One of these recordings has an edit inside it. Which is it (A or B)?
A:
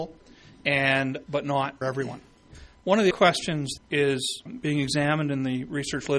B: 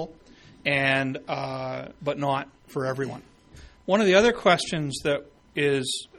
A